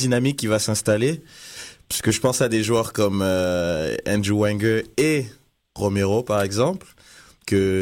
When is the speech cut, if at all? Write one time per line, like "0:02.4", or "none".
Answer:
none